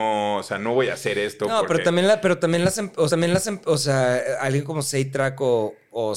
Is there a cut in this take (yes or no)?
yes